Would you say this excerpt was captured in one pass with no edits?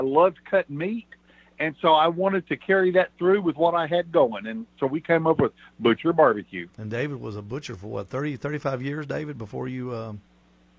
yes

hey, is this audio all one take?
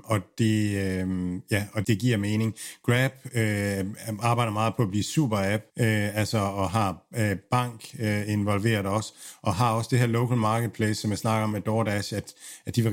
no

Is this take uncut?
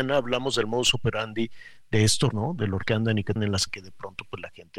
no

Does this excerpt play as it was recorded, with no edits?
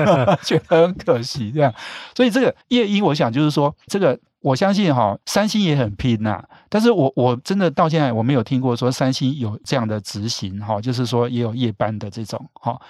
no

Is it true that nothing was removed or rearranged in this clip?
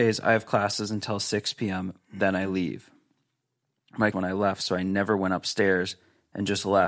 no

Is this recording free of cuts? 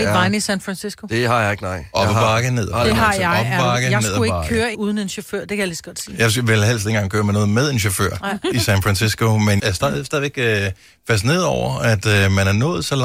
no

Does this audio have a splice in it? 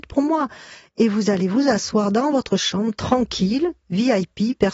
no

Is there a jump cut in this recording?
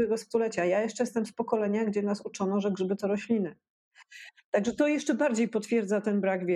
no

